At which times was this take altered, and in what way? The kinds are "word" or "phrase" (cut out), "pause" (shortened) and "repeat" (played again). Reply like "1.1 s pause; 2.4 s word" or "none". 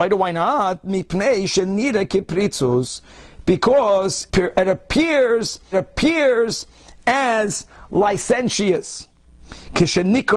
4.3 s word; 5.7 s repeat; 9.3 s pause